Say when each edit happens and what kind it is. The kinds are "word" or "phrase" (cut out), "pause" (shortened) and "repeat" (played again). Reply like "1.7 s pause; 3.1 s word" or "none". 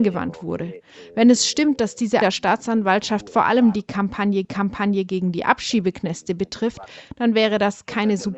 2.2 s word; 4.4 s repeat